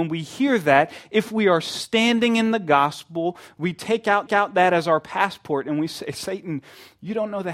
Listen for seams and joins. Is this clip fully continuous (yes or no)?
no